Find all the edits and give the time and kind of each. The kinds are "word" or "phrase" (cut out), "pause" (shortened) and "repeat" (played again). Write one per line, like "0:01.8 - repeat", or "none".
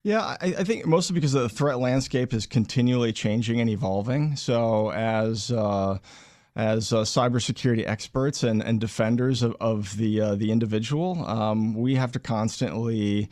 none

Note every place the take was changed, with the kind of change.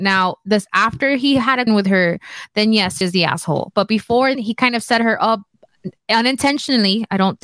0:01.7 - word
0:03.0 - word
0:04.3 - word

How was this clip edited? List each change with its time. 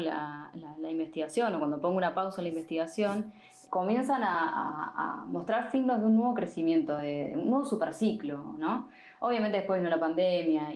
none

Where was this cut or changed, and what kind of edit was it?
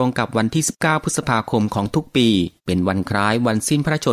0:02.6 - pause

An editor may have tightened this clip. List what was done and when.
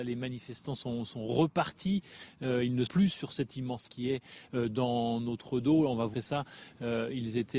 0:02.9 - word
0:03.9 - word
0:06.1 - word

